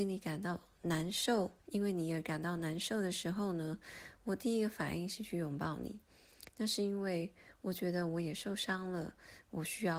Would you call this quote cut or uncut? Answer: cut